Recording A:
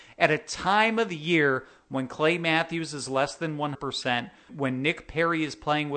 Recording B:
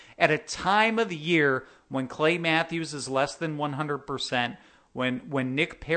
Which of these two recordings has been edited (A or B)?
A